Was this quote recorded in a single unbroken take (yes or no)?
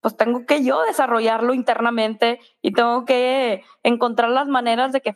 yes